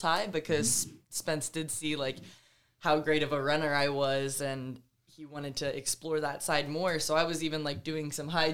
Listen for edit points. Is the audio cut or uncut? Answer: uncut